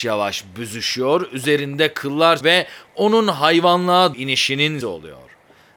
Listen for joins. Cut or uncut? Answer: cut